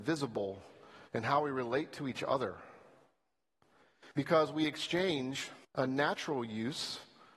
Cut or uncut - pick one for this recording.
cut